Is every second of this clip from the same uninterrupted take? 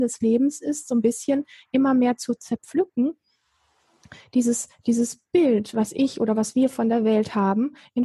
yes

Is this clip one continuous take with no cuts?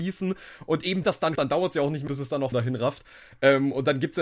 no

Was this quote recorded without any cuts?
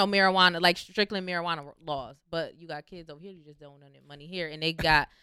yes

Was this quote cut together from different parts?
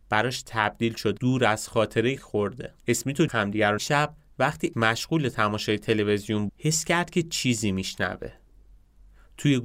yes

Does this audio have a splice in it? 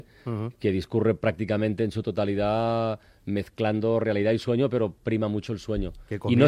no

